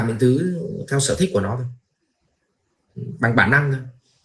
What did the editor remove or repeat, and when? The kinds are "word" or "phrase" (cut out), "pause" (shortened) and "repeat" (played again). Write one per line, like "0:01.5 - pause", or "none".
none